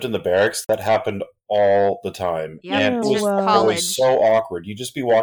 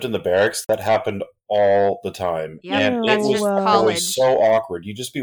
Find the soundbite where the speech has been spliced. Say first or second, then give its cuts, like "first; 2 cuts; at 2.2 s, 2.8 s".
first; 1 cut; at 3.0 s